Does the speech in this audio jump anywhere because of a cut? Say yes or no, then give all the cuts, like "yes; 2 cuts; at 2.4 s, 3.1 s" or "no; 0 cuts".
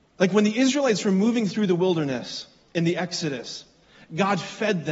no; 0 cuts